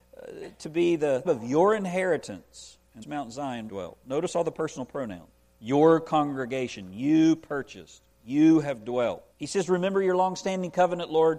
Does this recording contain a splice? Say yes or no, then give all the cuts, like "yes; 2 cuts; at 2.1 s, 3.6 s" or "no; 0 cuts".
yes; 6 cuts; at 1.2 s, 3.0 s, 3.7 s, 5.3 s, 8.1 s, 9.3 s